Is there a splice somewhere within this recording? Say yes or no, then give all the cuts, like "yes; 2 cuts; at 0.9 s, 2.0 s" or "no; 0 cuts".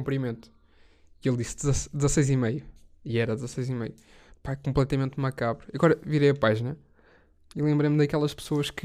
no; 0 cuts